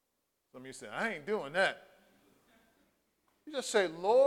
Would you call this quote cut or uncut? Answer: uncut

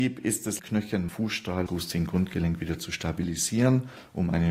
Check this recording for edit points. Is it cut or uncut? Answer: cut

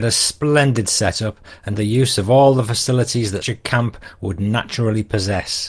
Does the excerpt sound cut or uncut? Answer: cut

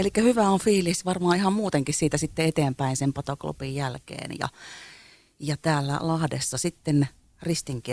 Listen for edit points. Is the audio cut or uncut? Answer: uncut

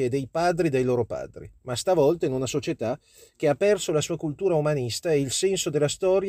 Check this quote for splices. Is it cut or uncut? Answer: uncut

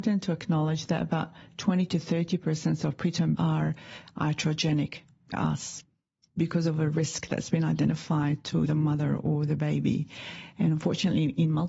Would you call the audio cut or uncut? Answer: cut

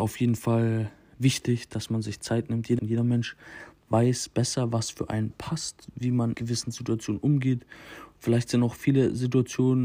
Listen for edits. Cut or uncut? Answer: cut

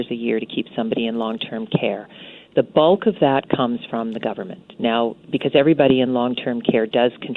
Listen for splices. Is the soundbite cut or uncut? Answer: uncut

